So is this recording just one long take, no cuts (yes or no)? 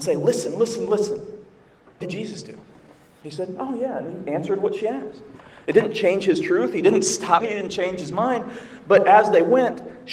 no